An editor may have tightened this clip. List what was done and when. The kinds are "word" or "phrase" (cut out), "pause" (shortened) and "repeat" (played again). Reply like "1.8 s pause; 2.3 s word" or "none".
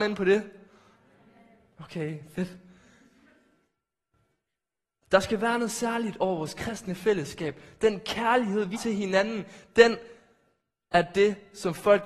8.7 s word

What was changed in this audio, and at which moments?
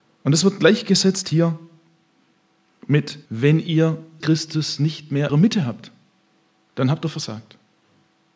3.3 s pause; 4.2 s word; 5.3 s phrase

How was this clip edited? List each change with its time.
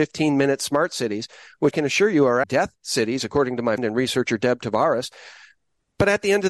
1.7 s word; 2.4 s word; 3.8 s word

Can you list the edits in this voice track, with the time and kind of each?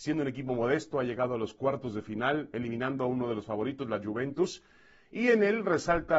none

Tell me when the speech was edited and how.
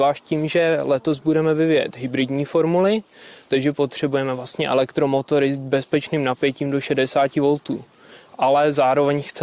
none

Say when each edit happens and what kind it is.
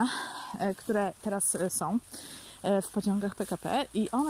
none

